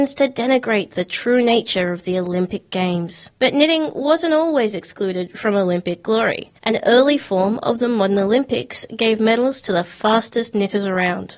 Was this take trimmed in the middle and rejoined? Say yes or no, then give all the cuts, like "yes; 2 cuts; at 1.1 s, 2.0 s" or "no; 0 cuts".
yes; 2 cuts; at 3.3 s, 6.6 s